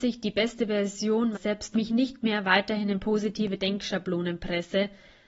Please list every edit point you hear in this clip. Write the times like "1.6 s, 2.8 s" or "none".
1.3 s, 1.7 s